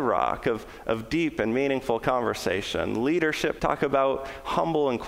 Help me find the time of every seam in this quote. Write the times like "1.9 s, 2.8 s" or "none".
3.6 s

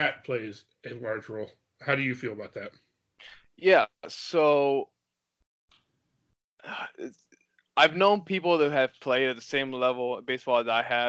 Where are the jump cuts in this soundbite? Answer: none

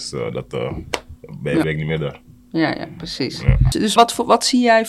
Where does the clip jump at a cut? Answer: 1.6 s, 2.7 s, 4.0 s

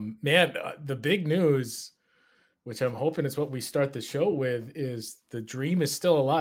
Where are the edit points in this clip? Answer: none

